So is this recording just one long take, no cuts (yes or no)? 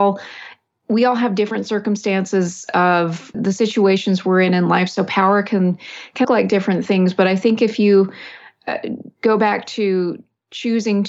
no